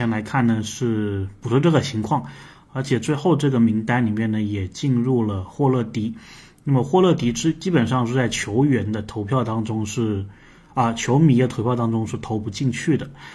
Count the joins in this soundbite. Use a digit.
0